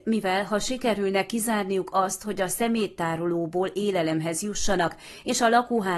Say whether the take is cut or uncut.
uncut